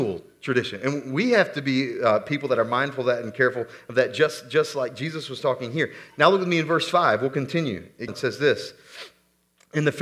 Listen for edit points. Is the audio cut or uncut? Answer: cut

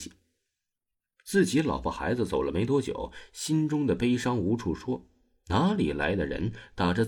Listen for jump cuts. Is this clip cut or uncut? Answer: uncut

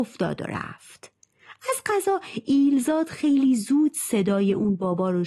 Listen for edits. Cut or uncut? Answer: uncut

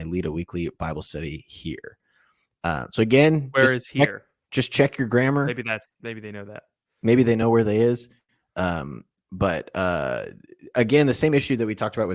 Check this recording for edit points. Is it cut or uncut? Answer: uncut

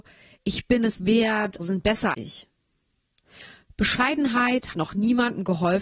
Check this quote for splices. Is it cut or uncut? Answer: cut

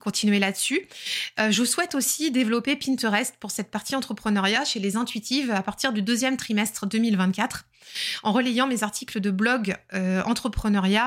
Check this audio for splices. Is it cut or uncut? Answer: uncut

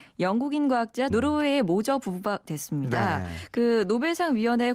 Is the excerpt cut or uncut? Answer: cut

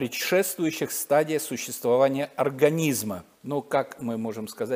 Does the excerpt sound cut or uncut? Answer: cut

